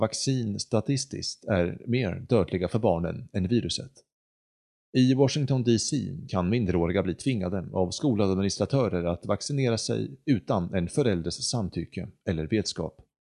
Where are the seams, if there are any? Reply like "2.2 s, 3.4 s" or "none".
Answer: none